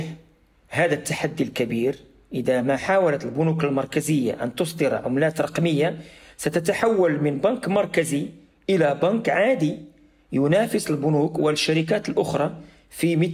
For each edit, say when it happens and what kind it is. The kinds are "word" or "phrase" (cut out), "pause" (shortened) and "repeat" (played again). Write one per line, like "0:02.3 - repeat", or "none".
none